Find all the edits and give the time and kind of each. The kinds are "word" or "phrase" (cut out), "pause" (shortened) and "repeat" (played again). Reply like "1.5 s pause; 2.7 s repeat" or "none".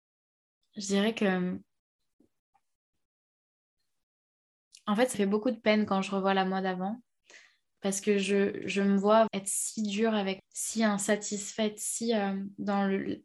5.1 s word; 8.6 s word; 9.3 s word; 10.4 s word